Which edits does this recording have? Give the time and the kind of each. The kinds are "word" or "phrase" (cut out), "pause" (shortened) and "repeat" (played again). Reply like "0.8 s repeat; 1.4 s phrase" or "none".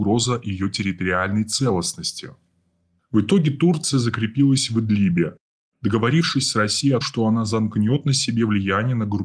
7.0 s word